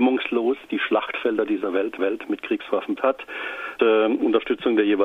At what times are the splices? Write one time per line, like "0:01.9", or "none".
0:02.0
0:03.0
0:03.8